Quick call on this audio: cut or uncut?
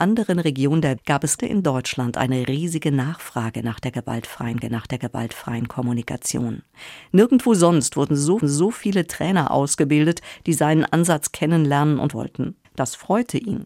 cut